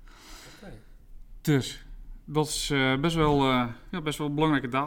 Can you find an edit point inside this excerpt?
no; 0 cuts

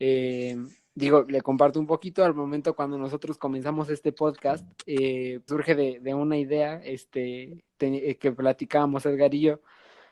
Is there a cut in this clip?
yes; 2 cuts; at 5.5 s, 7.7 s

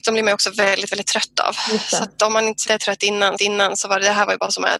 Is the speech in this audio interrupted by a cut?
yes; 2 cuts; at 2.7 s, 3.4 s

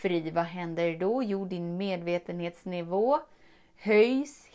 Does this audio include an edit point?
no; 0 cuts

